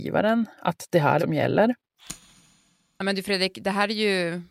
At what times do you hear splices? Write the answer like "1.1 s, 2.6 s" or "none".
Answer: 1.2 s